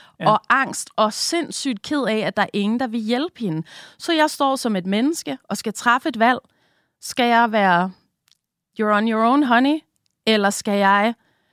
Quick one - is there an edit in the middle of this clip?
no; 0 cuts

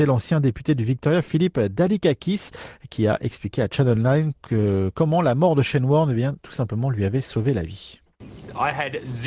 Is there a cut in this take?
no; 0 cuts

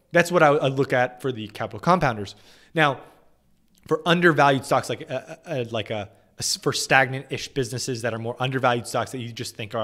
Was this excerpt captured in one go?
yes; 0 cuts

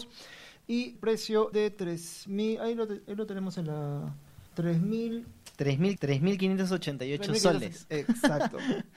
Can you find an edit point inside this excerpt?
yes; 4 cuts; at 1.0 s, 1.5 s, 4.5 s, 6.0 s

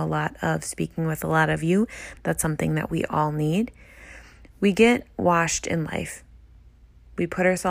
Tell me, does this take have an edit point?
no; 0 cuts

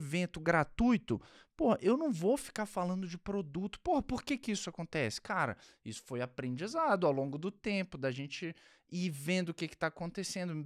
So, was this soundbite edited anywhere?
no; 0 cuts

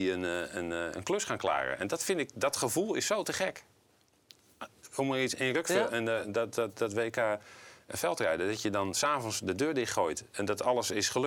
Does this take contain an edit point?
no; 0 cuts

